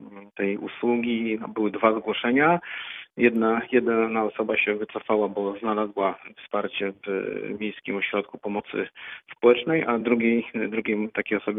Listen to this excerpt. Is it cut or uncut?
uncut